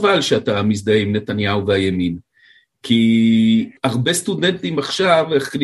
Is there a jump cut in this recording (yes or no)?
yes